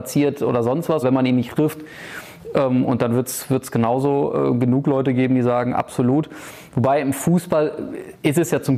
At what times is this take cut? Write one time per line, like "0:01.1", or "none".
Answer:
0:01.0
0:01.5